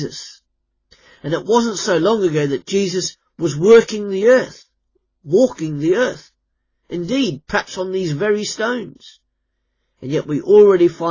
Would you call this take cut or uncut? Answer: uncut